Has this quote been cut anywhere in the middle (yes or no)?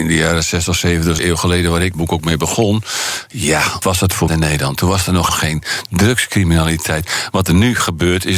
yes